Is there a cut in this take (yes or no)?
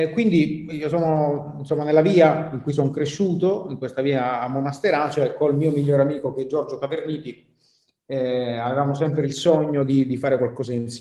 no